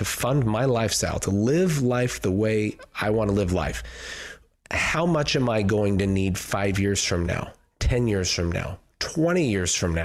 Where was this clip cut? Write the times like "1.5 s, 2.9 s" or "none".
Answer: none